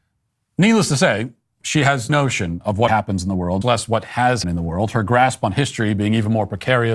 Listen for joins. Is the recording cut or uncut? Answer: cut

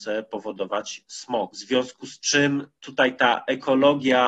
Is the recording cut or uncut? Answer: uncut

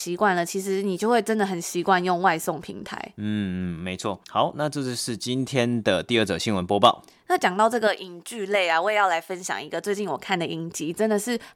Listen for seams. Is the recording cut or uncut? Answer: cut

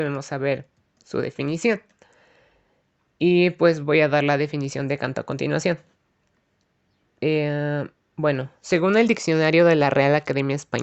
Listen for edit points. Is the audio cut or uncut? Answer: uncut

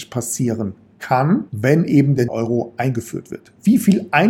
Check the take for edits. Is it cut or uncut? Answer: cut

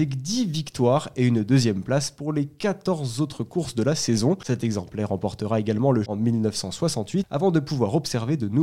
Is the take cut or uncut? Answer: cut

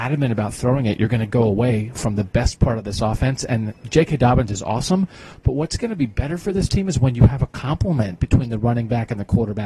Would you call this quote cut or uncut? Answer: uncut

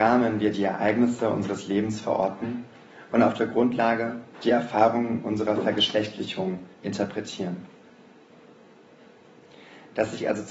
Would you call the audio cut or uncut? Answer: cut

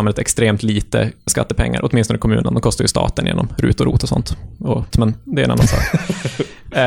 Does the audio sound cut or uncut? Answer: cut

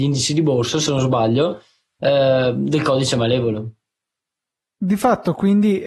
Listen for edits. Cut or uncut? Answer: uncut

